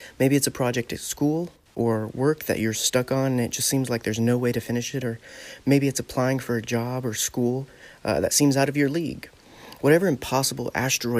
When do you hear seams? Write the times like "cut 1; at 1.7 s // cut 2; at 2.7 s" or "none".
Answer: none